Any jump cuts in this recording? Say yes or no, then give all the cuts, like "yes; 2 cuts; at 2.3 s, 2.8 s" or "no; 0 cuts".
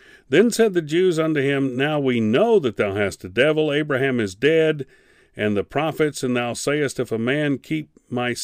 no; 0 cuts